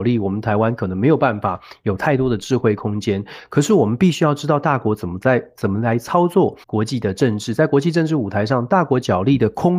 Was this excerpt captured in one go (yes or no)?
no